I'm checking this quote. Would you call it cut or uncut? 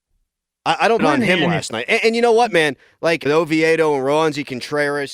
cut